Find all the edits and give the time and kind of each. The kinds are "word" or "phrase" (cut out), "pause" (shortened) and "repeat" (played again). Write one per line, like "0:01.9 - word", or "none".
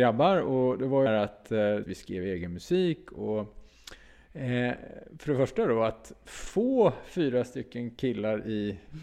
0:01.1 - phrase
0:01.8 - word

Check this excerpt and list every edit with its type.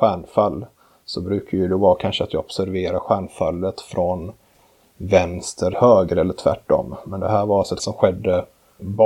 0:05.7 - word
0:07.8 - word

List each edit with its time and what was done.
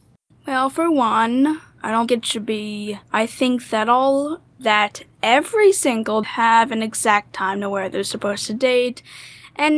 0:02.1 - word
0:03.0 - pause
0:04.5 - pause
0:06.2 - phrase

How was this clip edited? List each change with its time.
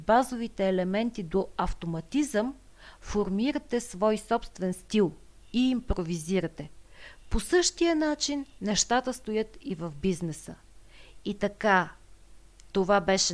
none

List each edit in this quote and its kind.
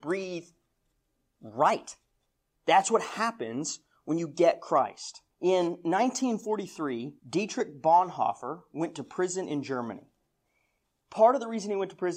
0:05.3 - pause
0:07.2 - pause

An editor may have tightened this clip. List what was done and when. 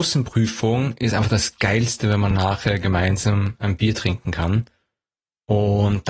none

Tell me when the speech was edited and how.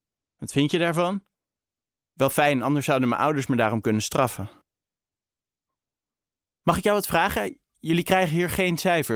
none

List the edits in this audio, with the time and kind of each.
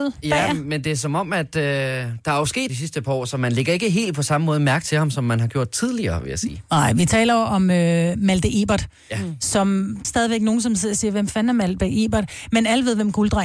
0:02.7 - phrase
0:10.0 - phrase

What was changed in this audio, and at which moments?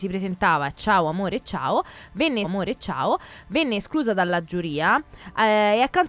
0:02.4 - repeat

